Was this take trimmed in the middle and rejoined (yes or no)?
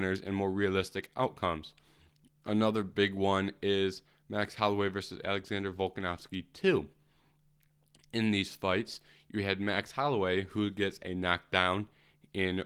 no